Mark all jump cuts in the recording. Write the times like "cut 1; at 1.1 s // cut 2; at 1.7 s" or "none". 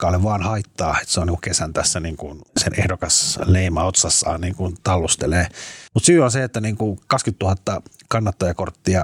cut 1; at 2.5 s // cut 2; at 5.9 s